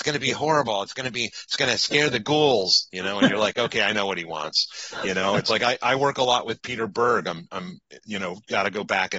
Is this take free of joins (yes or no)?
yes